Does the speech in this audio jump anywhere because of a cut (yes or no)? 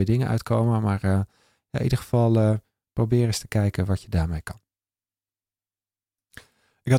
no